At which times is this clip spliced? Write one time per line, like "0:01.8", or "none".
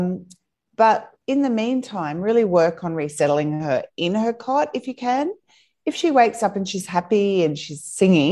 none